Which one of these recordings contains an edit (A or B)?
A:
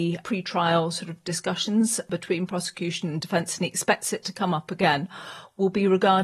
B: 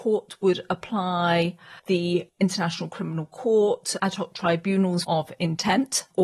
B